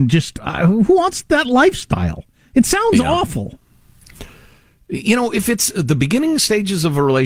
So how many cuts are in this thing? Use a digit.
0